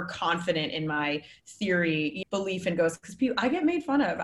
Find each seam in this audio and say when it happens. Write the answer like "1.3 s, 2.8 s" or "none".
2.2 s